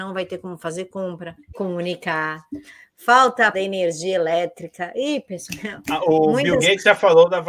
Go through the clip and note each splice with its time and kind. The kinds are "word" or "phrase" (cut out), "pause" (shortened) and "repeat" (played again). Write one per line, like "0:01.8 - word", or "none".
0:01.5 - phrase
0:03.5 - word